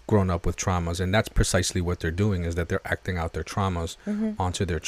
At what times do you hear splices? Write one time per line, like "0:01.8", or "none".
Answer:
none